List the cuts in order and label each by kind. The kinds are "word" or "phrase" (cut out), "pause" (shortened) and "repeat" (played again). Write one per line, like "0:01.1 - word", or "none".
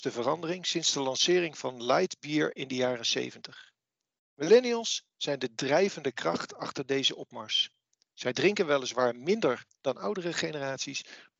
none